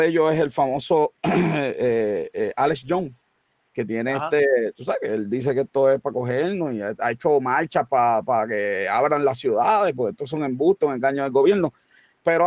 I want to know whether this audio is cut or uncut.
uncut